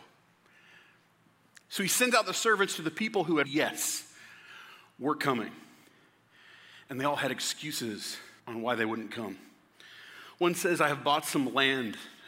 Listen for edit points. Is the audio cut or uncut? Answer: cut